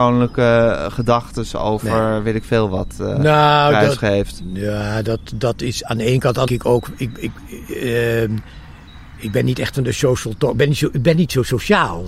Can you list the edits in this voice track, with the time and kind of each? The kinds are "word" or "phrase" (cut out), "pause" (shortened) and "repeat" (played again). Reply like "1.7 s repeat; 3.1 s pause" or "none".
6.5 s phrase